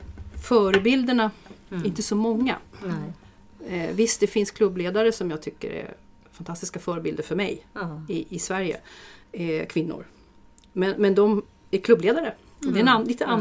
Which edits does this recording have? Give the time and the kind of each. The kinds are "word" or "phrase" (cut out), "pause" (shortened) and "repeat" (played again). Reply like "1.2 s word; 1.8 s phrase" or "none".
none